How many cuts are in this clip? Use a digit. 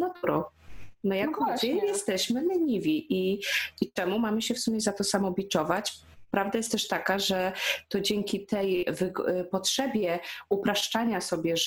0